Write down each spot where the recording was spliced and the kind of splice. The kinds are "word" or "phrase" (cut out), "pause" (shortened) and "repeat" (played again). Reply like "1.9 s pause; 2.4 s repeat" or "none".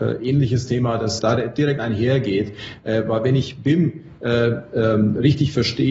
1.2 s word